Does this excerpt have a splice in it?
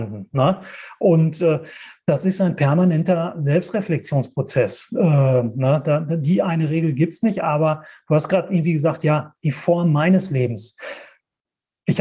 no; 0 cuts

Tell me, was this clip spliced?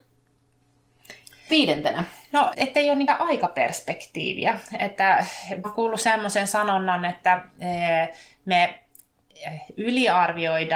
yes; 4 cuts; at 1.5 s, 2.5 s, 3.1 s, 5.6 s

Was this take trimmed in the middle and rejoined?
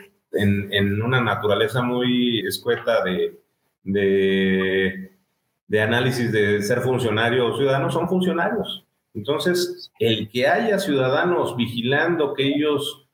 yes; 1 cut; at 2.4 s

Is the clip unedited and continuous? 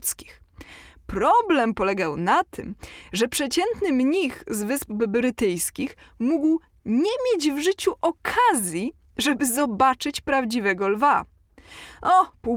yes; 0 cuts

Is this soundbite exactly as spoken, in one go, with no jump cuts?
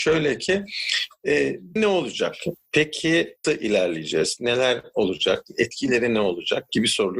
no; 2 cuts; at 1.8 s, 3.4 s

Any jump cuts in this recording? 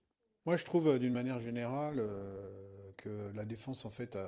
no; 0 cuts

